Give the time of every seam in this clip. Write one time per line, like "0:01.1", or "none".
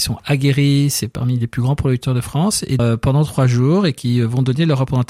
0:02.8